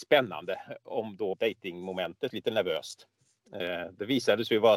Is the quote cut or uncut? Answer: cut